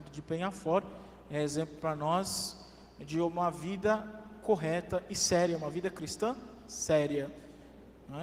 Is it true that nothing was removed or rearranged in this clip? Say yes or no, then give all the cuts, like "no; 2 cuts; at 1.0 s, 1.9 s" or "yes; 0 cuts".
yes; 0 cuts